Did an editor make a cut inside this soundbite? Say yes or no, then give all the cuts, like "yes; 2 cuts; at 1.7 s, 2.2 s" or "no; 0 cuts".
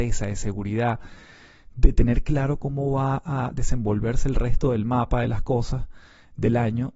no; 0 cuts